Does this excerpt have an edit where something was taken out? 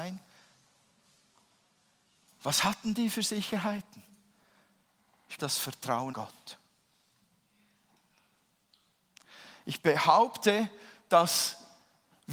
yes; 2 cuts; at 5.4 s, 6.1 s

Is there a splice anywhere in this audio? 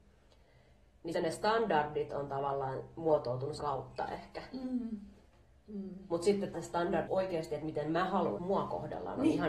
yes; 5 cuts; at 1.1 s, 3.6 s, 6.5 s, 7.1 s, 8.4 s

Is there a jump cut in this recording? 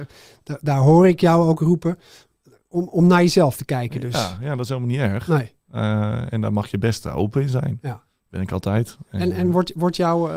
no; 0 cuts

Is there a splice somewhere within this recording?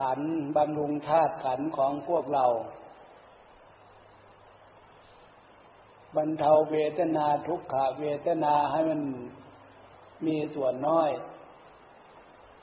no; 0 cuts

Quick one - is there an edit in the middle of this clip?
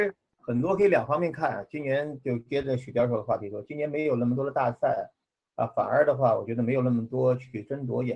no; 0 cuts

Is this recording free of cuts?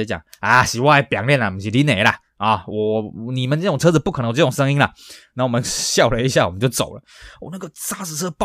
yes; 0 cuts

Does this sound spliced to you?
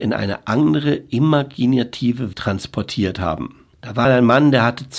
yes; 3 cuts; at 2.3 s, 3.7 s, 4.0 s

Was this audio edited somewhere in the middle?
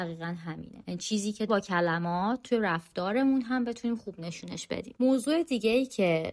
yes; 1 cut; at 1.5 s

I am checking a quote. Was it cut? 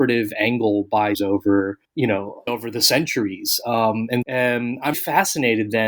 yes; 5 cuts; at 1.1 s, 1.8 s, 2.5 s, 4.2 s, 4.9 s

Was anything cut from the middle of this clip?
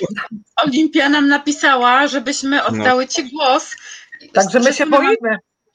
no; 0 cuts

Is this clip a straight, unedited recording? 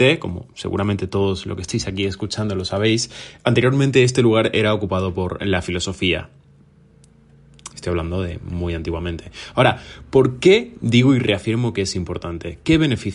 no; 1 cut; at 7.7 s

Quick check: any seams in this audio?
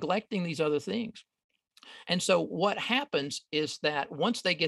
no; 0 cuts

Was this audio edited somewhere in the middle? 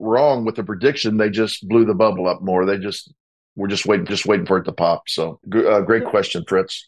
yes; 2 cuts; at 4.1 s, 5.4 s

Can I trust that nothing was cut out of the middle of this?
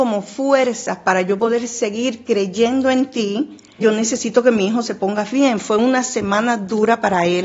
no; 1 cut; at 3.8 s

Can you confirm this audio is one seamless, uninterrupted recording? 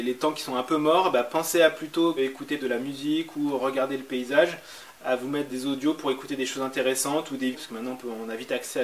no; 4 cuts; at 2.2 s, 2.6 s, 5.5 s, 7.5 s

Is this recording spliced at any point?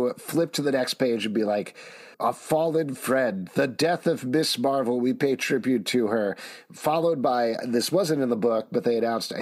yes; 1 cut; at 2.1 s

